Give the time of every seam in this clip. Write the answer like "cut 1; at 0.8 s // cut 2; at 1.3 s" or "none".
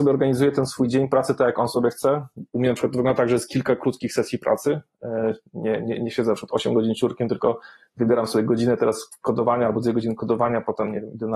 none